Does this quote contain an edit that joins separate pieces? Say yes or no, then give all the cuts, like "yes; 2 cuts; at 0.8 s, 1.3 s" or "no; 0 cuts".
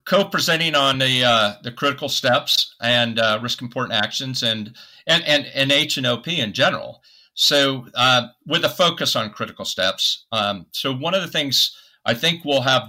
no; 0 cuts